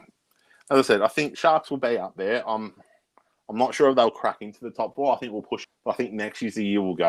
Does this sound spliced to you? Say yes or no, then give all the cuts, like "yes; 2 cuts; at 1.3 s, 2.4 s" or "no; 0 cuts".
yes; 1 cut; at 5.6 s